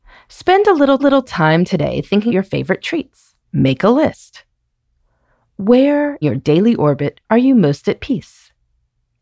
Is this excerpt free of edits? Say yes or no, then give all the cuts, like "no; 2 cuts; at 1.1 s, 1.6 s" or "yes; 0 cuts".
no; 5 cuts; at 1.0 s, 2.3 s, 3.4 s, 6.2 s, 7.2 s